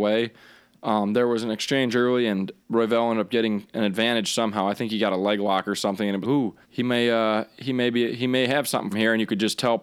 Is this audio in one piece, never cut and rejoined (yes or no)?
no